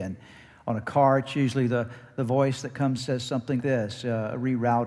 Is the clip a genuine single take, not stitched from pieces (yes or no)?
no